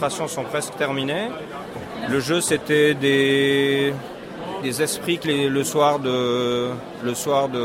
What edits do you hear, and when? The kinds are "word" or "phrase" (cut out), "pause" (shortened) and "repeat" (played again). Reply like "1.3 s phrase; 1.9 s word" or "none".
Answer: 4.6 s word; 5.2 s phrase